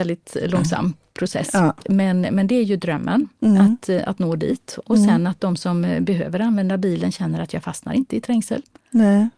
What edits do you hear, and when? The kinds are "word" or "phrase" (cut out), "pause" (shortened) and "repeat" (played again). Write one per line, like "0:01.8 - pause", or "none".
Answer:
none